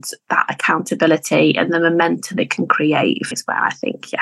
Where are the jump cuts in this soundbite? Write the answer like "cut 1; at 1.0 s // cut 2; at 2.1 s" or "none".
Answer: cut 1; at 2.4 s // cut 2; at 3.3 s

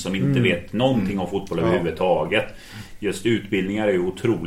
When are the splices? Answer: none

